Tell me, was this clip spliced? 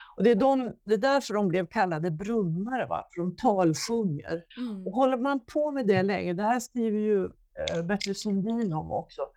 yes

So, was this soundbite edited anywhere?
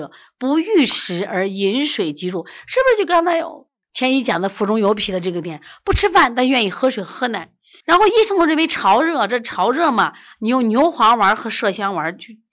yes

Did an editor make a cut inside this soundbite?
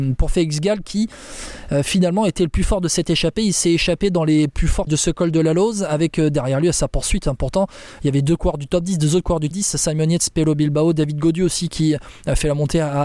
yes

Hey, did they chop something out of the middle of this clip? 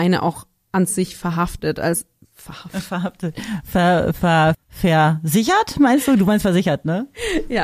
yes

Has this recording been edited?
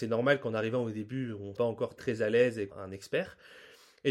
yes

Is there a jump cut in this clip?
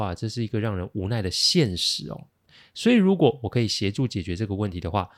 no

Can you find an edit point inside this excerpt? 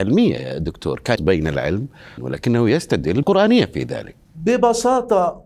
yes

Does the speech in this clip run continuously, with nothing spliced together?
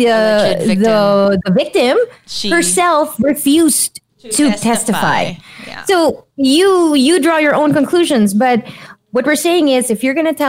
no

